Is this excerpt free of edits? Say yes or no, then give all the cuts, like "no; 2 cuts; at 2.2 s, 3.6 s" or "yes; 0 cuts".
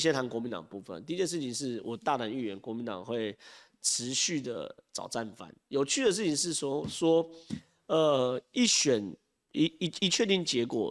yes; 0 cuts